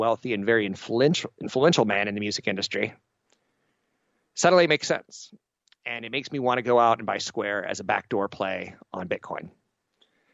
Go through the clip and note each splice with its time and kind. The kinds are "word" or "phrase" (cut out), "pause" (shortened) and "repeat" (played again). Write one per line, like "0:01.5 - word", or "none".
none